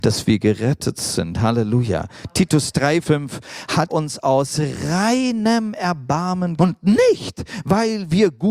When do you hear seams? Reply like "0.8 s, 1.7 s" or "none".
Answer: 3.0 s, 3.9 s, 6.6 s